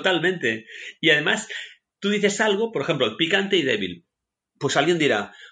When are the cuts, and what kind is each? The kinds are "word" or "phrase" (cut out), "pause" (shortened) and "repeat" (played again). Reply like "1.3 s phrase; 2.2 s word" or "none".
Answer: none